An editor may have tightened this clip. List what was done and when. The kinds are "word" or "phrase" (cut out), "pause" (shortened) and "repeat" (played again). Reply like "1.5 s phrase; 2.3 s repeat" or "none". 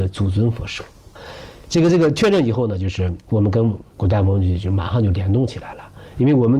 3.9 s pause